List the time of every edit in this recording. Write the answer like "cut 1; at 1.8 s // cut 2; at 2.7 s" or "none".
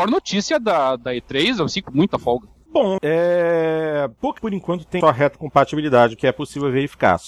cut 1; at 1.8 s // cut 2; at 3.0 s // cut 3; at 4.4 s // cut 4; at 5.0 s // cut 5; at 6.2 s